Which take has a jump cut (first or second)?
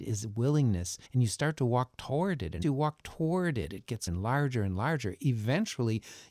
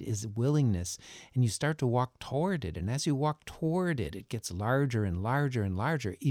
first